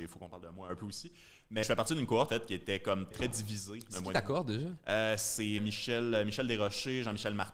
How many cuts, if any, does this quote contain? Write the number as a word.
four